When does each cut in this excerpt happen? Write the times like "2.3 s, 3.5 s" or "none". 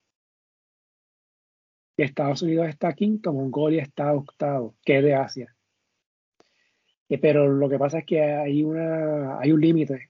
4.8 s